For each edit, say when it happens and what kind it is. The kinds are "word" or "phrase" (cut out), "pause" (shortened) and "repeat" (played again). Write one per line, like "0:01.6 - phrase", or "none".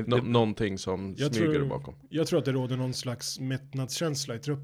none